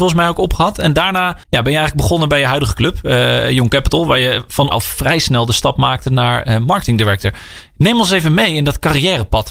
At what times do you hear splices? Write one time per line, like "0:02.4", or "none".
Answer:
0:01.4
0:04.7